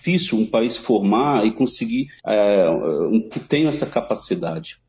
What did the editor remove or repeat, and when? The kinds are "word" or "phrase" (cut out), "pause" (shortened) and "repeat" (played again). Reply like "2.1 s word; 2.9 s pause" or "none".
2.2 s pause; 3.3 s word